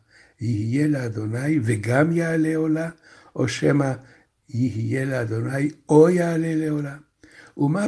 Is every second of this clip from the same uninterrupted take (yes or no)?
yes